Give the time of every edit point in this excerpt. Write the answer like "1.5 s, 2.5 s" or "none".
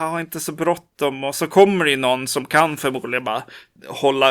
none